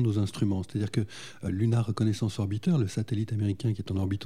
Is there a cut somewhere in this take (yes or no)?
yes